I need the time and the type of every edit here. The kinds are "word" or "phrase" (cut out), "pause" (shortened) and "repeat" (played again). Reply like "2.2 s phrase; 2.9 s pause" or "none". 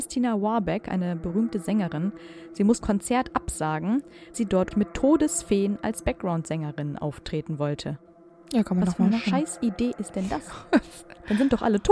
2.8 s word; 4.3 s word; 4.7 s word